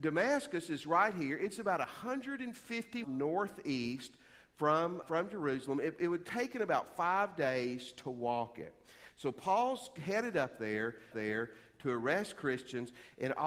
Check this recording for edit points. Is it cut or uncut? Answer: cut